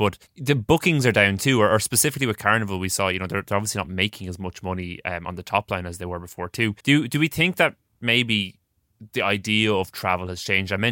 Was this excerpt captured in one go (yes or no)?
no